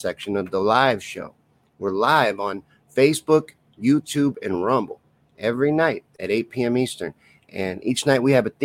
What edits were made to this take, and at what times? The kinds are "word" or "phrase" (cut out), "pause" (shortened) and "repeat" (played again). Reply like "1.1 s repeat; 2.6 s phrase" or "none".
none